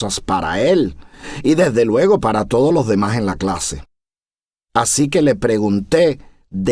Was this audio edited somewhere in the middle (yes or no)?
no